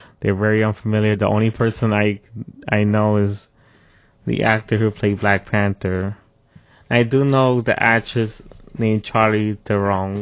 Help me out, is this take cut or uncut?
uncut